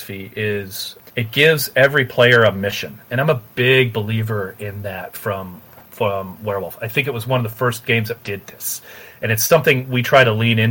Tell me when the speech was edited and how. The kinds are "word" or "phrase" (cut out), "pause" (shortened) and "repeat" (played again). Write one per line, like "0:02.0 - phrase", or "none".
0:08.2 - word